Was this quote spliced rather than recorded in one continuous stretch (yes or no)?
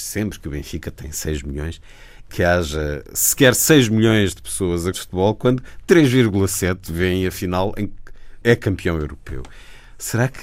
yes